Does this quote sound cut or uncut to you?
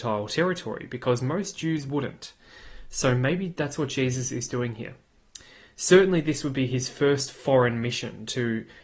uncut